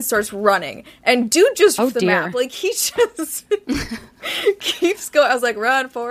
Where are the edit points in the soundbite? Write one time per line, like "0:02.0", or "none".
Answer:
0:01.8